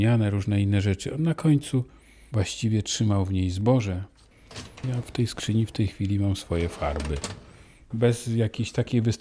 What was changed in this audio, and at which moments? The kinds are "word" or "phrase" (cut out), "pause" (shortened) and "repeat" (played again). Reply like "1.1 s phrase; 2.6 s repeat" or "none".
none